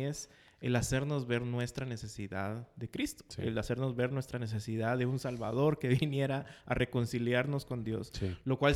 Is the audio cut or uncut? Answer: uncut